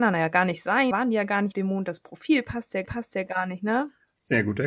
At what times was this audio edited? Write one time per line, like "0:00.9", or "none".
0:00.9
0:01.5
0:02.8